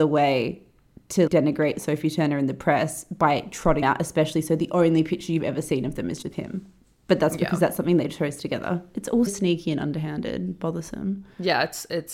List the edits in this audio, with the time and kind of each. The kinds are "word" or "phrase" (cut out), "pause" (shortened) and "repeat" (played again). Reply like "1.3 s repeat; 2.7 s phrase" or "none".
1.3 s word; 3.8 s word; 6.2 s word; 9.3 s word